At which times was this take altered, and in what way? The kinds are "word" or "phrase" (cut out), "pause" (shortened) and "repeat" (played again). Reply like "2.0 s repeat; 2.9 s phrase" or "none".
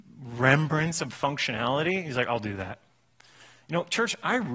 none

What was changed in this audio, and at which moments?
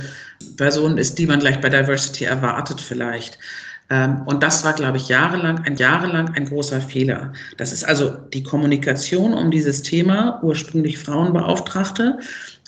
5.8 s repeat

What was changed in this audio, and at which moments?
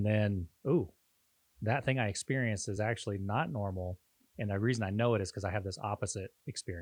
none

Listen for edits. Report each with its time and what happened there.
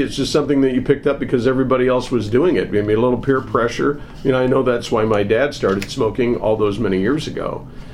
none

